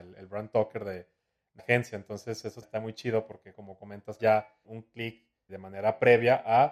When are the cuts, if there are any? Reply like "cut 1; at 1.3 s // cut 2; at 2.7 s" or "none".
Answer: cut 1; at 1.6 s // cut 2; at 2.6 s // cut 3; at 3.5 s // cut 4; at 4.2 s // cut 5; at 4.6 s // cut 6; at 5.5 s